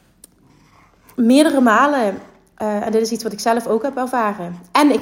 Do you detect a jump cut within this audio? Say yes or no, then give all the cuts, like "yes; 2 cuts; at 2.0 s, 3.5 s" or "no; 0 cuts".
no; 0 cuts